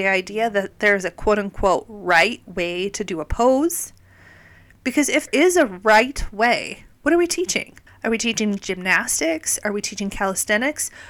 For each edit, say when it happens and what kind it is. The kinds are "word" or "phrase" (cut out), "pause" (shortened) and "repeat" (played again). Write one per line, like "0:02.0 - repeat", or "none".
0:05.3 - word
0:06.9 - pause
0:07.9 - pause